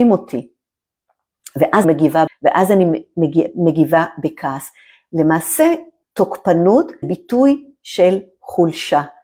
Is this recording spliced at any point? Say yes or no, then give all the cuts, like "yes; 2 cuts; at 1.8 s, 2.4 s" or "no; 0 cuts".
yes; 4 cuts; at 1.8 s, 2.3 s, 6.0 s, 7.0 s